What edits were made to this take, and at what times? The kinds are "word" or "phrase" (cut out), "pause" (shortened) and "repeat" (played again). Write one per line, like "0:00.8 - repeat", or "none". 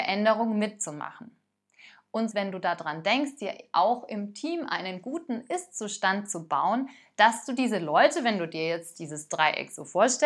0:02.3 - phrase